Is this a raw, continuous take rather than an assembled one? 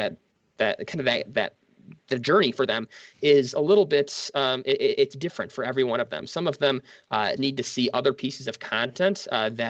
no; 1 cut; at 7.4 s

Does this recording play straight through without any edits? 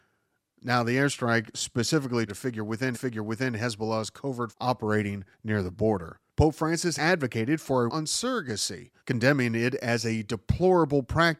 no; 8 cuts; at 2.3 s, 2.9 s, 4.5 s, 5.3 s, 6.3 s, 7.0 s, 7.9 s, 9.0 s

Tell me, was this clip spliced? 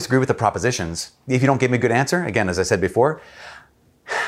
no; 0 cuts

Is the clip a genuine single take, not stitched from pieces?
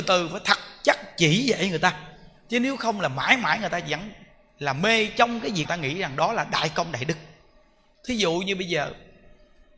no; 1 cut; at 5.6 s

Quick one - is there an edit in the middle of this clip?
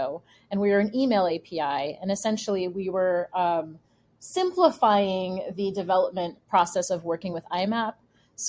no; 0 cuts

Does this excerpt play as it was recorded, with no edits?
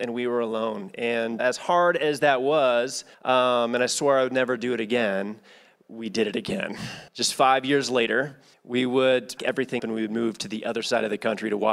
no; 6 cuts; at 1.4 s, 3.1 s, 7.1 s, 8.5 s, 9.4 s, 9.8 s

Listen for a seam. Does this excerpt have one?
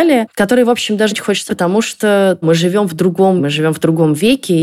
yes; 4 cuts; at 1.1 s, 1.5 s, 2.4 s, 3.4 s

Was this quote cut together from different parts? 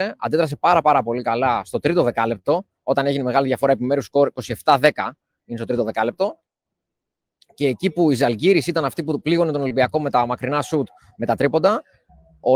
no; 0 cuts

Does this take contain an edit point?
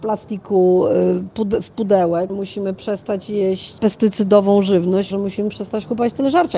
yes; 3 cuts; at 2.3 s, 3.8 s, 5.1 s

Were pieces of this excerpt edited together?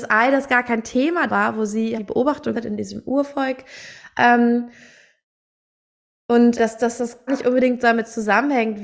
yes; 5 cuts; at 1.3 s, 2.0 s, 2.5 s, 6.6 s, 7.3 s

